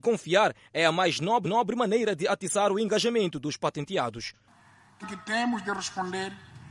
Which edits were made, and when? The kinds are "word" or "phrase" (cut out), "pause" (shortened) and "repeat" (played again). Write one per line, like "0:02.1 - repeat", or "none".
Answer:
0:01.4 - repeat
0:05.0 - phrase

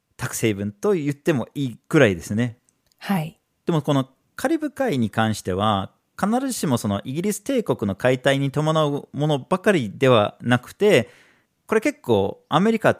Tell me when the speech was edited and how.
none

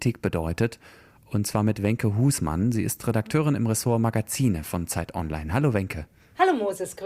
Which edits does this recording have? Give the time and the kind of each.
none

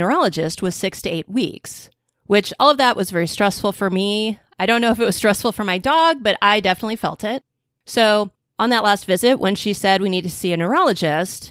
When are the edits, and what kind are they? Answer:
none

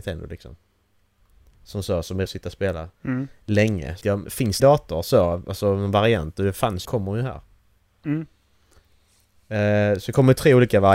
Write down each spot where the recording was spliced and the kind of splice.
0:02.3 - word
0:02.9 - pause
0:04.0 - word
0:04.6 - phrase
0:06.8 - phrase

